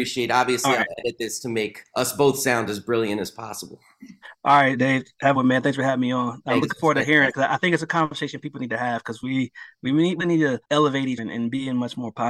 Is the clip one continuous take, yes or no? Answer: no